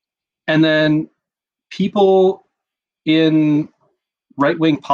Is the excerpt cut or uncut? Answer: uncut